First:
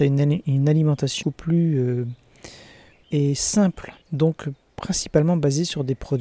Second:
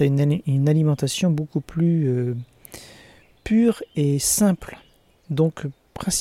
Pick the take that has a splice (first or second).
first